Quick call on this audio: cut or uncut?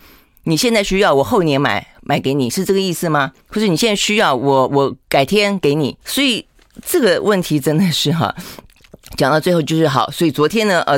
cut